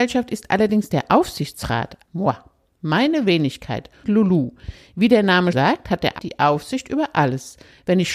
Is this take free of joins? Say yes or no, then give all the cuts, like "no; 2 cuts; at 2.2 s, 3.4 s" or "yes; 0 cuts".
no; 4 cuts; at 2.1 s, 4.0 s, 5.5 s, 6.2 s